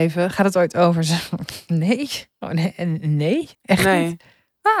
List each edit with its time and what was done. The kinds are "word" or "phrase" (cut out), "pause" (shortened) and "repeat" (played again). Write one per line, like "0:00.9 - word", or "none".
0:03.5 - pause